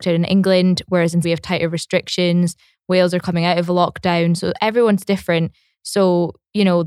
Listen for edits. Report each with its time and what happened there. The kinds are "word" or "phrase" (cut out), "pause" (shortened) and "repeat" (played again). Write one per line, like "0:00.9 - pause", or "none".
0:01.2 - word